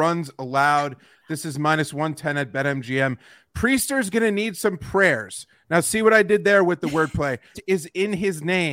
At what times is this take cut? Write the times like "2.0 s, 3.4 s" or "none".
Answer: 7.5 s